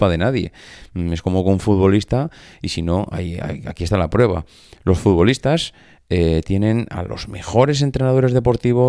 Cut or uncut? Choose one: uncut